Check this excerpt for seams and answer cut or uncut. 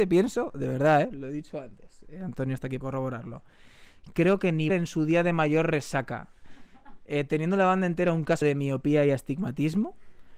cut